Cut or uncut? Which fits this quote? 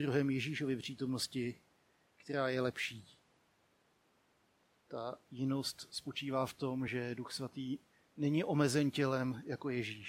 uncut